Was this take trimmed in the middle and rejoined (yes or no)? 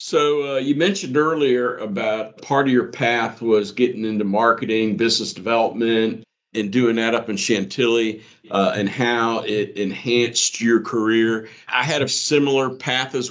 yes